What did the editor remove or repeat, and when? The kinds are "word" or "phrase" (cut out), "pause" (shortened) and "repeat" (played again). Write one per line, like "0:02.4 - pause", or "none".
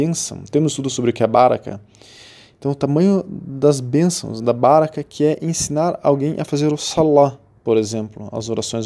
none